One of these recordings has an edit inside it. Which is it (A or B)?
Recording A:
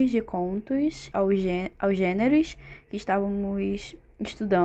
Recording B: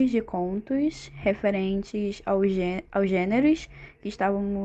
A